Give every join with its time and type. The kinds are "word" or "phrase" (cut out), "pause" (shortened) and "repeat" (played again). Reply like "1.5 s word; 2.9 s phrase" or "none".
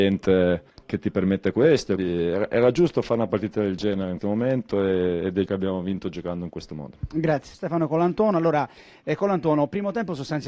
2.0 s word; 4.2 s word; 5.5 s word; 7.5 s word